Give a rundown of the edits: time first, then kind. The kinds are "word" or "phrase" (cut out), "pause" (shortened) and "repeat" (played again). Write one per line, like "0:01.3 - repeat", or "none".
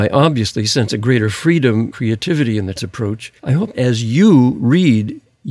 0:01.9 - word
0:02.8 - word
0:03.4 - pause
0:03.7 - word